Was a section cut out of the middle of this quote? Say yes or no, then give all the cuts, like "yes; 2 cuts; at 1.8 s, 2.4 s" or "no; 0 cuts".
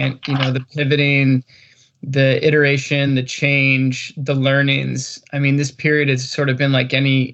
no; 0 cuts